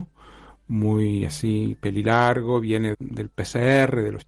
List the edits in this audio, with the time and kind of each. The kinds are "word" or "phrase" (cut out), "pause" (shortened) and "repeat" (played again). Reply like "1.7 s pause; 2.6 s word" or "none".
2.9 s word

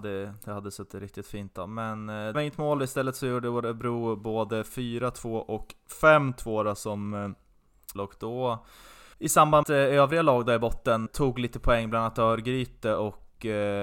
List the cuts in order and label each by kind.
2.3 s word; 8.0 s phrase; 9.1 s pause; 9.6 s phrase; 11.1 s word

